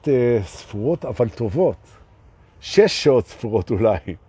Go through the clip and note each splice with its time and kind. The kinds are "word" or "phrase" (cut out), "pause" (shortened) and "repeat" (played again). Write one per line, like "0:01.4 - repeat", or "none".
none

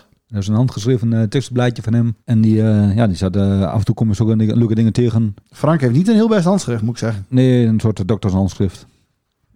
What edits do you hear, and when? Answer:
0:02.2 - pause
0:05.4 - pause

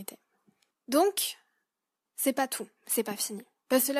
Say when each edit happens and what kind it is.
0:02.8 - pause

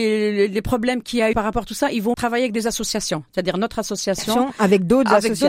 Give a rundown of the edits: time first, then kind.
0:01.3 - word
0:02.1 - word

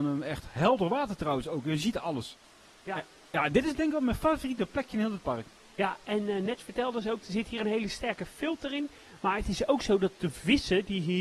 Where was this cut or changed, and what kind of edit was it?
none

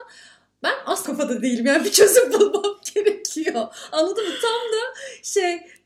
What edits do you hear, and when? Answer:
0:01.1 - word

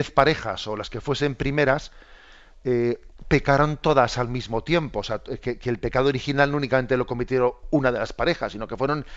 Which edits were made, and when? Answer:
none

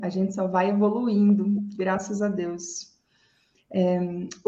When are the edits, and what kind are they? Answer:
none

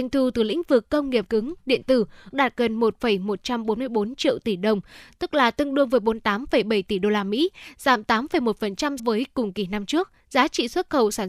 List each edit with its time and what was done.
0:01.3 - word
0:02.3 - word
0:09.0 - word
0:10.2 - pause

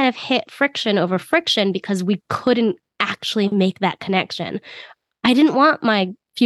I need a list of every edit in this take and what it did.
none

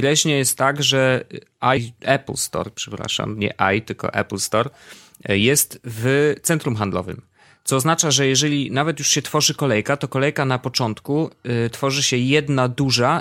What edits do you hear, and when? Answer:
0:01.8 - word

